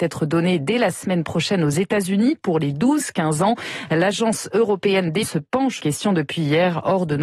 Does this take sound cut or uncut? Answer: cut